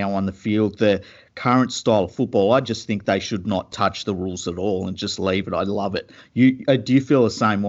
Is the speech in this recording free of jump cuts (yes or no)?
yes